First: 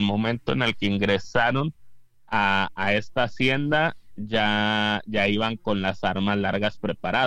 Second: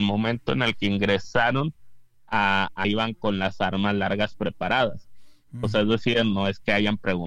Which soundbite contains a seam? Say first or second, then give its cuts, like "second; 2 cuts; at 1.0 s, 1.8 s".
second; 1 cut; at 2.8 s